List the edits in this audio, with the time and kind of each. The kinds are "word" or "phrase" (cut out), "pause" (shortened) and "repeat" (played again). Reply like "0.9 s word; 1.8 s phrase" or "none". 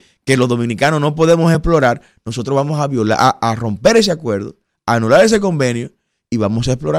none

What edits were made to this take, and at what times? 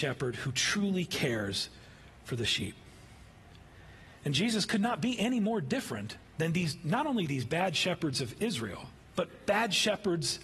none

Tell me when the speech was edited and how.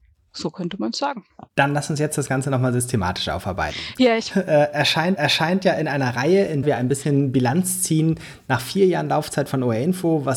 1.5 s pause; 4.3 s phrase; 5.2 s repeat; 6.6 s word

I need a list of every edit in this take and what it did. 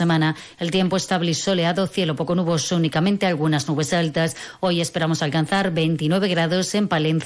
none

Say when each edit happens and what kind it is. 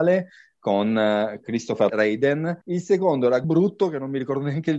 1.9 s phrase; 2.6 s pause; 3.4 s word

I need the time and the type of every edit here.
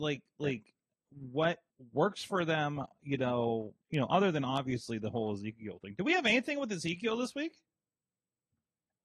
1.7 s pause; 3.8 s pause

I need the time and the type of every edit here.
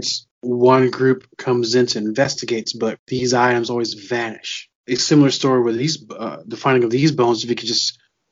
none

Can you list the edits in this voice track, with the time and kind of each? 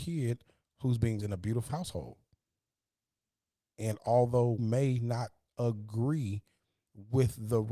1.2 s word; 1.7 s word; 4.6 s word

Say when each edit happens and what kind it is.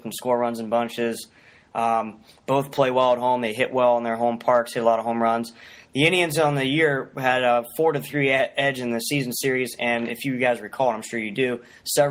none

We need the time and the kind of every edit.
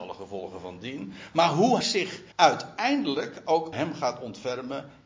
1.8 s word; 2.3 s pause; 3.7 s word

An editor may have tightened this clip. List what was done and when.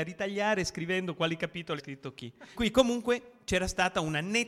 1.8 s word; 2.5 s word

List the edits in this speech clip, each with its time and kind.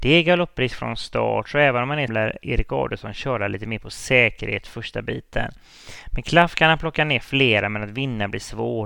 2.1 s word

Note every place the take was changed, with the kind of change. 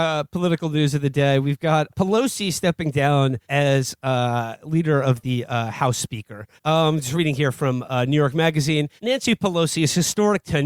1.9 s word; 3.4 s pause; 6.6 s pause; 9.0 s pause

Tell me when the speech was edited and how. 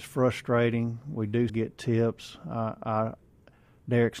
1.5 s word

